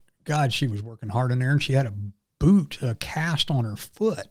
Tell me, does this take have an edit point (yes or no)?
no